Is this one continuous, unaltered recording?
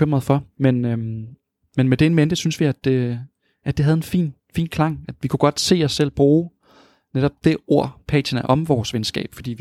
yes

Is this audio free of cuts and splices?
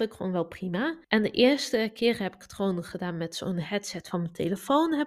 no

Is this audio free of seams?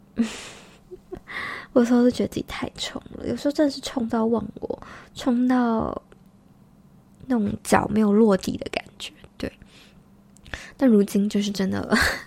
yes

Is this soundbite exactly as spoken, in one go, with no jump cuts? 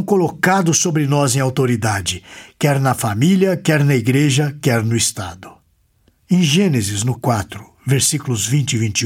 no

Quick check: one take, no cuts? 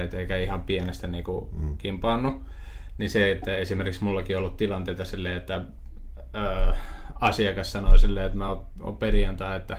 yes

